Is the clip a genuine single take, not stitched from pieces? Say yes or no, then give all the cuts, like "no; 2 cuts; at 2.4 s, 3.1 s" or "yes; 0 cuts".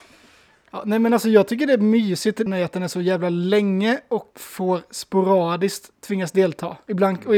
no; 2 cuts; at 2.5 s, 4.3 s